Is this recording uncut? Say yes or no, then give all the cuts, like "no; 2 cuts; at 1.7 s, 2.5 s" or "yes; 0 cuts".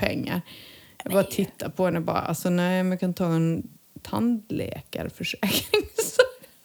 yes; 0 cuts